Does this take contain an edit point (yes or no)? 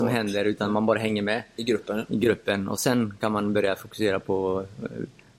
no